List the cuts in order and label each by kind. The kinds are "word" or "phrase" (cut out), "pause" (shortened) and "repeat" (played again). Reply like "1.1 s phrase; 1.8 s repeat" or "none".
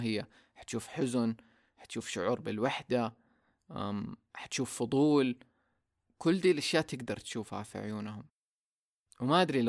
none